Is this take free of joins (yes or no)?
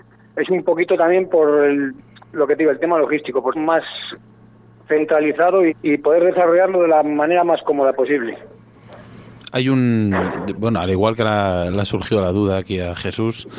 no